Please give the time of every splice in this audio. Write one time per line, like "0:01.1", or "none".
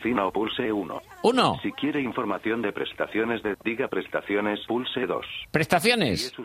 0:03.5
0:04.7